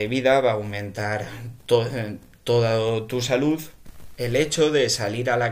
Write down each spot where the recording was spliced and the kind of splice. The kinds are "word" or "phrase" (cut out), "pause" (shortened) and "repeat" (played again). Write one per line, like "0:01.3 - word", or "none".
none